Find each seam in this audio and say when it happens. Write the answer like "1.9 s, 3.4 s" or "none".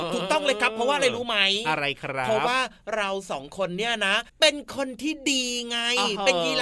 4.3 s